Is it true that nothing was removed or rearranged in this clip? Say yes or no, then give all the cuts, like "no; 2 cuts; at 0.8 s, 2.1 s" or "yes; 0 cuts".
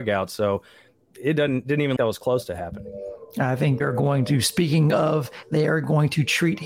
no; 3 cuts; at 2.0 s, 3.8 s, 5.4 s